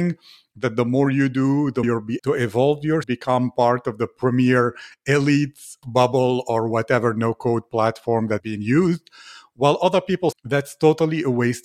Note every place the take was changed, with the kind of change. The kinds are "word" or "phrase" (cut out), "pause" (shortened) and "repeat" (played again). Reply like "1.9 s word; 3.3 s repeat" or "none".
1.8 s word; 2.2 s word; 3.0 s word; 5.8 s word; 8.4 s word; 10.3 s word